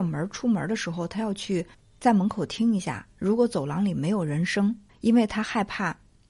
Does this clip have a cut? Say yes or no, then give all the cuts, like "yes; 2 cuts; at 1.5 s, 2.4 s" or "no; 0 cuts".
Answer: yes; 2 cuts; at 1.7 s, 4.9 s